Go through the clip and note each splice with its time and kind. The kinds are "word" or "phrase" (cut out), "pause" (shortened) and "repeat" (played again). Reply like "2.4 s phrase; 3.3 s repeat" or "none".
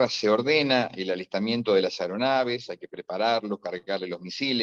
none